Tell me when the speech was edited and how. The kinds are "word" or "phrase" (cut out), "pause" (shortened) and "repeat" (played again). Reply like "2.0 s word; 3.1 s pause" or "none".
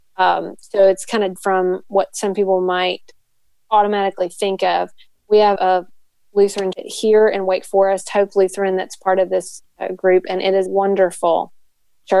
1.4 s word; 5.6 s word; 6.7 s word; 10.7 s word